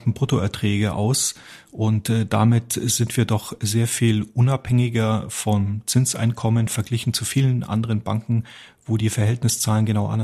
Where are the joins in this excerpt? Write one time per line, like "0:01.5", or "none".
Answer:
none